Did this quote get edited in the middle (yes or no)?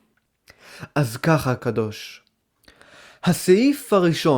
yes